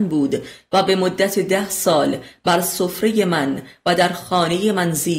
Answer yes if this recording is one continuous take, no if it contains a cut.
yes